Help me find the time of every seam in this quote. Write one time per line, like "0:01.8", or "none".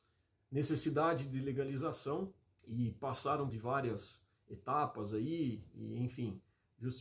0:02.4
0:03.5